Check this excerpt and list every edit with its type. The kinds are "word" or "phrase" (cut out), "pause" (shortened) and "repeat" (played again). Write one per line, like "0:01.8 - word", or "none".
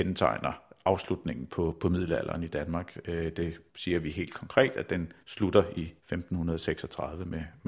0:03.7 - pause
0:05.2 - pause
0:06.0 - pause

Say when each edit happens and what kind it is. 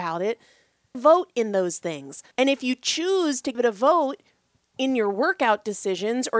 0:00.9 - phrase
0:02.3 - pause
0:03.5 - word

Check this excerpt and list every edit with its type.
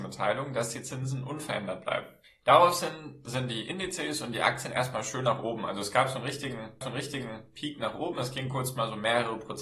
0:06.8 - repeat

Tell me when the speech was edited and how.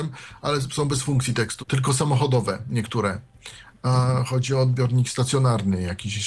0:01.6 - word

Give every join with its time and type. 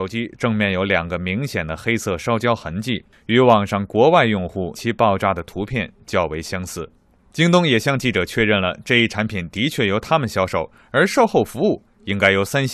0:04.7 - word

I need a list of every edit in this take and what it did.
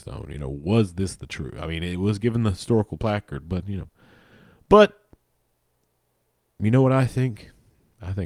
none

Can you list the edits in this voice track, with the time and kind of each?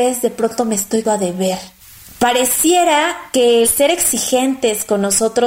0:01.0 - word
0:01.8 - pause
0:03.6 - word

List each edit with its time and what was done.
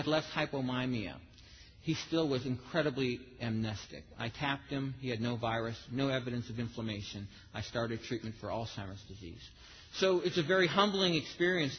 none

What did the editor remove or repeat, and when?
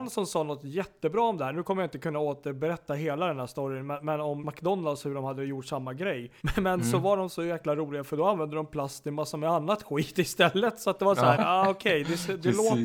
0:04.4 - word
0:06.4 - pause
0:11.3 - word

